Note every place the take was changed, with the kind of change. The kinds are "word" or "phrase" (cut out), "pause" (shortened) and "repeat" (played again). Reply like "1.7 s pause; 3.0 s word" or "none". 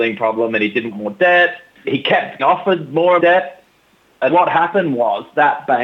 0.9 s word; 1.8 s word; 2.4 s word; 3.2 s word; 4.3 s word